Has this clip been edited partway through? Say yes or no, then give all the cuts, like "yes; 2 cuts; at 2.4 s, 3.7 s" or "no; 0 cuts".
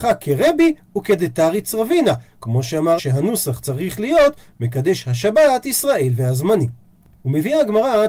yes; 1 cut; at 3.0 s